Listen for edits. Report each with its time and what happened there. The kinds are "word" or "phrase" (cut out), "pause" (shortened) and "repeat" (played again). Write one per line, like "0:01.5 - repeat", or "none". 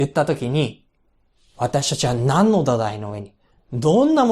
none

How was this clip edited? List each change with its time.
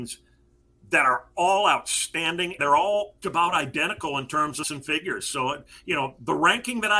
0:02.6 - word
0:03.2 - word
0:04.6 - word

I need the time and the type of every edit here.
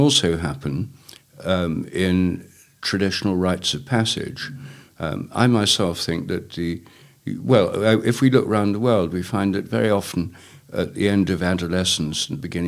none

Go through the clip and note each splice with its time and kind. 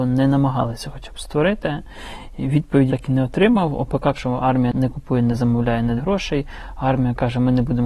0:02.9 - word
0:04.1 - word
0:04.7 - word
0:06.0 - word

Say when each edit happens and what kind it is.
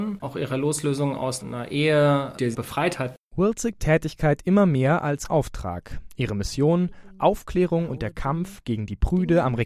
0:01.4 - word
0:02.5 - phrase
0:02.9 - phrase
0:03.8 - phrase
0:05.3 - word

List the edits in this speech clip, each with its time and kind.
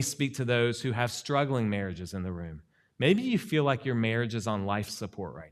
none

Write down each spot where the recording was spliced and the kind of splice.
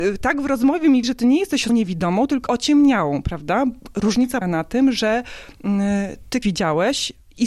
0:01.0 - word
0:01.7 - word
0:02.5 - word
0:04.4 - word
0:06.4 - word

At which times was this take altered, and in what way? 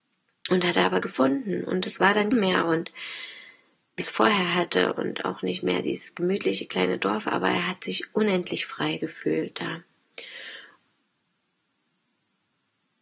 0:02.3 - phrase
0:04.0 - word

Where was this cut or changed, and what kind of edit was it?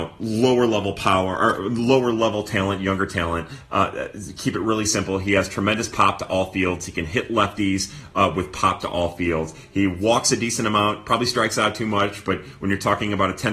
none

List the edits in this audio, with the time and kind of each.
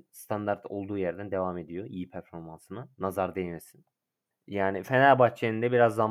0:02.9 - pause

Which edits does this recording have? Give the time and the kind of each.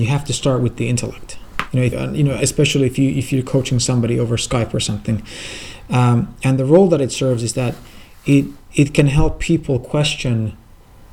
0:01.9 - word

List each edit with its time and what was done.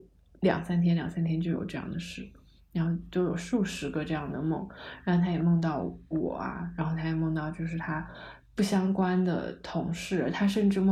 none

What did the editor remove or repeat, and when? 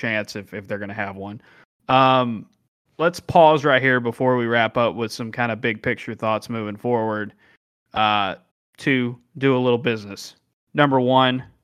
0:02.9 - word
0:08.5 - pause

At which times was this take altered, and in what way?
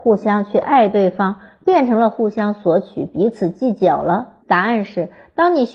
0:04.4 - pause

